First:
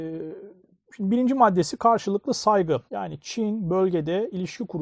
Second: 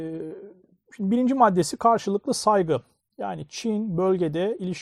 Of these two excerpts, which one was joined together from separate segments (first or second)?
first